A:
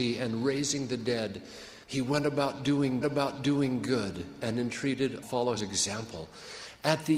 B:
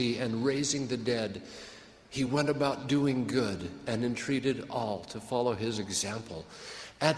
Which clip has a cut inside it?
A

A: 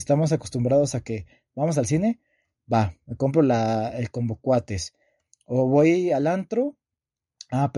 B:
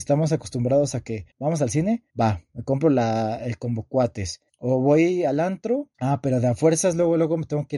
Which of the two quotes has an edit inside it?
B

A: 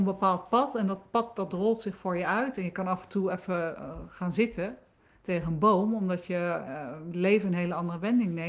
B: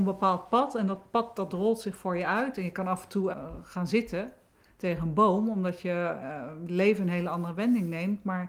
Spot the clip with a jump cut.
B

